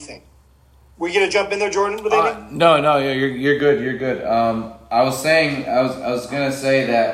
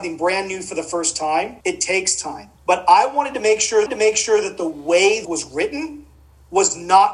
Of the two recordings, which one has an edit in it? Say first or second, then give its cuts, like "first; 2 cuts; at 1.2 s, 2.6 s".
second; 4 cuts; at 1.6 s, 2.6 s, 3.9 s, 5.2 s